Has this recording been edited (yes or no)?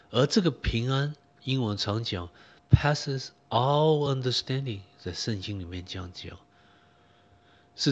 no